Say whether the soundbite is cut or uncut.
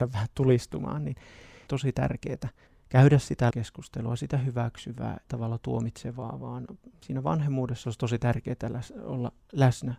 cut